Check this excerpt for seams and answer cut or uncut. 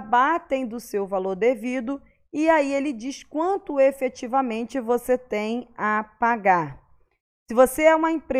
uncut